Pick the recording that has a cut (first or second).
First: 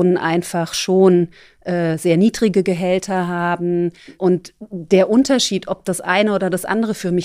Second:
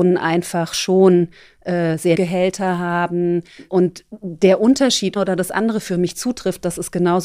second